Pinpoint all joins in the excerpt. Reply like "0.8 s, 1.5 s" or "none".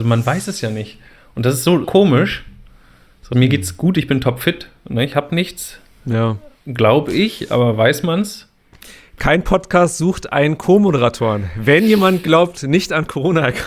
1.8 s, 3.3 s